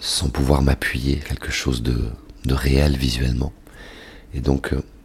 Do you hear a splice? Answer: yes; 1 cut; at 1.2 s

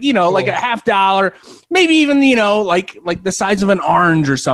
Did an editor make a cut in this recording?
no; 0 cuts

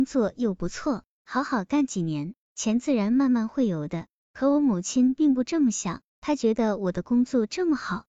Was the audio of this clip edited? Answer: yes; 1 cut; at 6.1 s

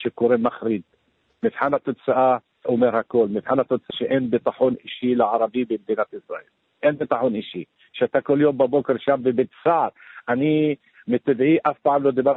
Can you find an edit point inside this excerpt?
yes; 2 cuts; at 2.6 s, 3.9 s

